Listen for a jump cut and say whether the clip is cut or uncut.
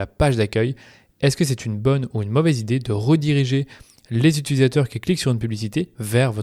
uncut